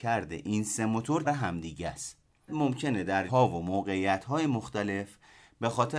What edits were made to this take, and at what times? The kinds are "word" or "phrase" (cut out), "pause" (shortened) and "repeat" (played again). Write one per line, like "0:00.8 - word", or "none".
0:01.2 - word
0:02.5 - word
0:03.3 - word